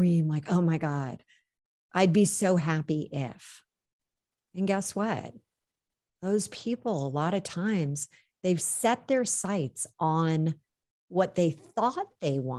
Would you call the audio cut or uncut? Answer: uncut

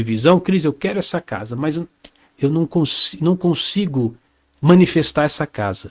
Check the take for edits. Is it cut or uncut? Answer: uncut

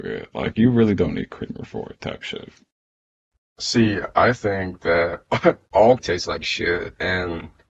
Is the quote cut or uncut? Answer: cut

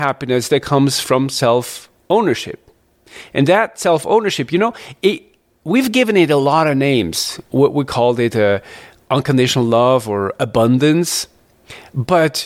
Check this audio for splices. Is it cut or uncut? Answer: uncut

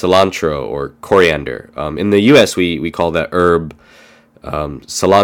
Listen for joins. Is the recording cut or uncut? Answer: uncut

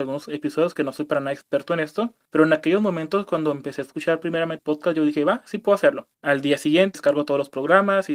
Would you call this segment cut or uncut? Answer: cut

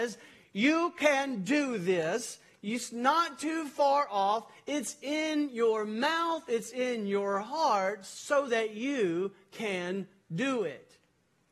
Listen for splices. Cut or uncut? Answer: uncut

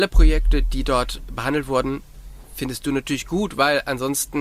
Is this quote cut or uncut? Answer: uncut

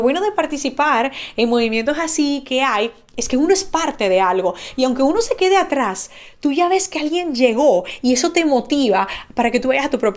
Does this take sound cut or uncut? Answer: uncut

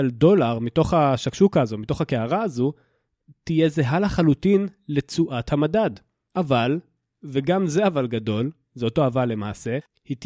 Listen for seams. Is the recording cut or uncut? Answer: uncut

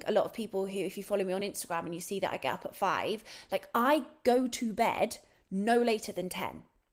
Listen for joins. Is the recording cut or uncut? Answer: uncut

